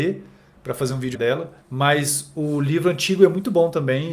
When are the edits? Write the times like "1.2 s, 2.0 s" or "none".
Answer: 1.1 s, 1.6 s

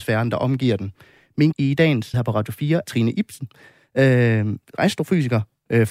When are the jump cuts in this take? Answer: 1.5 s, 2.1 s, 2.8 s

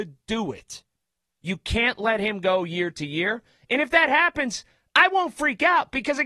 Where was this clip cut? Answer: none

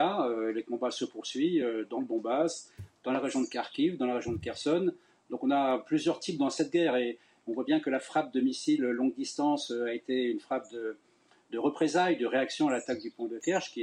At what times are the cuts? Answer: none

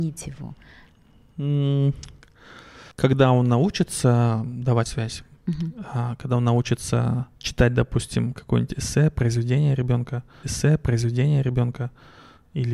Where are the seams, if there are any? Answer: 2.9 s, 4.9 s, 5.4 s, 7.4 s, 10.4 s

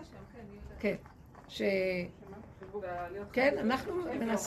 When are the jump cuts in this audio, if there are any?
2.8 s

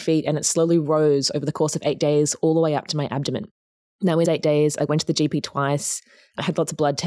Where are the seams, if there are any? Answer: 4.2 s

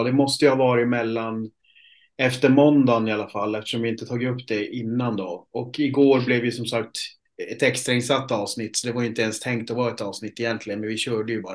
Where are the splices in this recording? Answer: none

